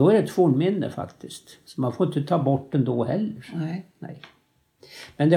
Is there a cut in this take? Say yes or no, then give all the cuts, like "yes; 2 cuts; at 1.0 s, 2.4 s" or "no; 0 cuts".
no; 0 cuts